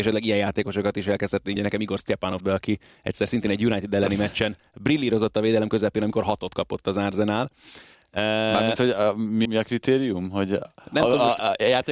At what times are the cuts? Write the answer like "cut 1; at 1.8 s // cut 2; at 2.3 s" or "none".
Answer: cut 1; at 1.6 s // cut 2; at 2.4 s // cut 3; at 9.4 s